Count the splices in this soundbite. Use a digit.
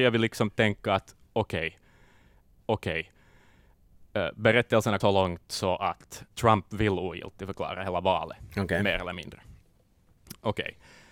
3